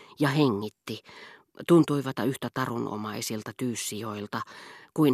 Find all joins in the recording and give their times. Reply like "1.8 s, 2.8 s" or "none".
2.2 s